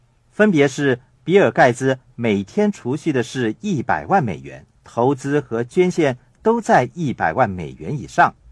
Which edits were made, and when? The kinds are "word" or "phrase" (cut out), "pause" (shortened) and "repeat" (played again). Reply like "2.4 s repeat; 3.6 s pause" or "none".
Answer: 4.8 s pause